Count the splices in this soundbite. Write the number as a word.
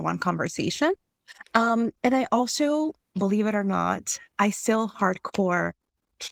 one